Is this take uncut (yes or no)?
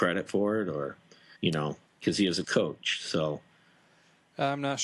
no